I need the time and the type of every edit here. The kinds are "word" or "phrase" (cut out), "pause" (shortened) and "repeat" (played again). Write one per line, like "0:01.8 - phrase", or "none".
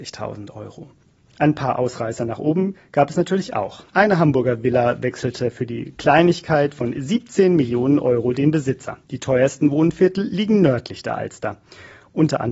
0:03.9 - pause
0:09.0 - pause